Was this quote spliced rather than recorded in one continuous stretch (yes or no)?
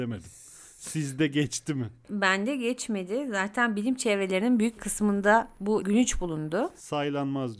yes